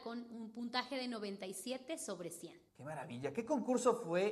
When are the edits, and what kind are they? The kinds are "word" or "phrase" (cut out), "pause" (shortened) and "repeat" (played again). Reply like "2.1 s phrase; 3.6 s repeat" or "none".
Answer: 2.7 s pause